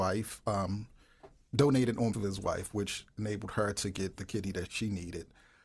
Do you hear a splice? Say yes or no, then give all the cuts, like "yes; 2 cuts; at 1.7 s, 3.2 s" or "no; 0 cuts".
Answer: yes; 3 cuts; at 2.1 s, 4.2 s, 4.7 s